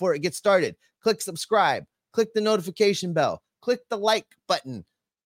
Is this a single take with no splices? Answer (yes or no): yes